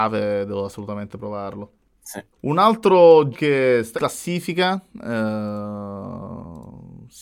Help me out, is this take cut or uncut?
cut